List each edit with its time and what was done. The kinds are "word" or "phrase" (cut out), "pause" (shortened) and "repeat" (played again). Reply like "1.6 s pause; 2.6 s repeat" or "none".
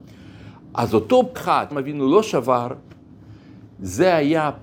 1.3 s word; 1.7 s word